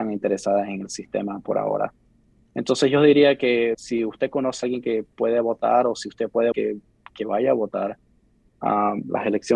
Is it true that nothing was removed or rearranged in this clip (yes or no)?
no